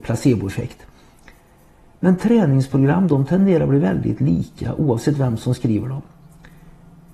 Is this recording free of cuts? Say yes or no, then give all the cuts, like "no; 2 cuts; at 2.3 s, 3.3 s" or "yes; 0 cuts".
yes; 0 cuts